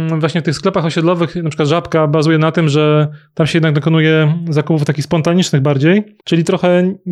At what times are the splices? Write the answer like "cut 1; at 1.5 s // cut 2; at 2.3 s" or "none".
cut 1; at 6.2 s